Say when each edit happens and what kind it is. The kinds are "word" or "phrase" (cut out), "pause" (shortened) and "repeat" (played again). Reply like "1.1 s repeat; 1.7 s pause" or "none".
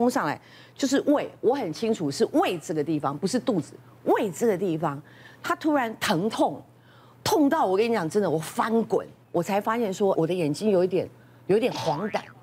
10.2 s phrase